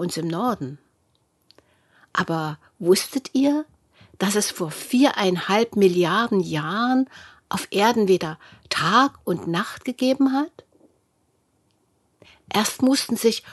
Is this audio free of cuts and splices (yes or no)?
yes